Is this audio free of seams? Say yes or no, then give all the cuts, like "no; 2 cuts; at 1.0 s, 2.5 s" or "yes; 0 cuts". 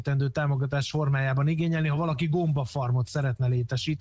yes; 0 cuts